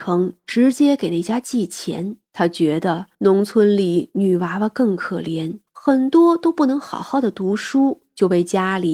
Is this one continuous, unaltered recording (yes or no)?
no